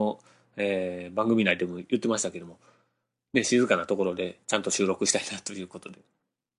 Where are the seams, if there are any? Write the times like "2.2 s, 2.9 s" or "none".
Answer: 4.4 s